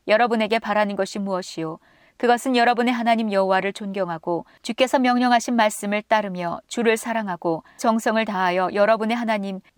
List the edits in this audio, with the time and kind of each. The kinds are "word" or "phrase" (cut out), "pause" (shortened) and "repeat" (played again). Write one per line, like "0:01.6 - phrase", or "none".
0:07.8 - word